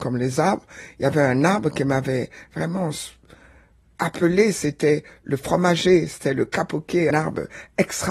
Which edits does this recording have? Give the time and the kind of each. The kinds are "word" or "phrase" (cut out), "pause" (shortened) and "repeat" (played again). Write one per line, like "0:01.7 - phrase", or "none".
0:07.1 - word